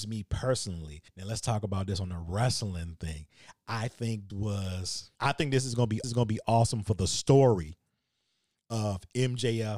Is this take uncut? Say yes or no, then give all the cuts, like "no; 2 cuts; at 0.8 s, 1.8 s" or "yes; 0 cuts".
no; 4 cuts; at 1.1 s, 4.3 s, 5.1 s, 6.0 s